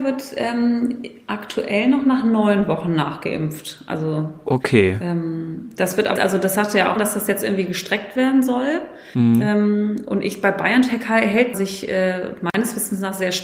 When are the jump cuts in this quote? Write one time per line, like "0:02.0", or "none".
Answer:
0:06.2
0:07.0
0:11.5